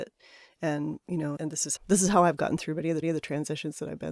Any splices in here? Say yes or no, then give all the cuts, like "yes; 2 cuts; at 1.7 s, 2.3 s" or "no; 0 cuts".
yes; 3 cuts; at 1.4 s, 1.8 s, 3.0 s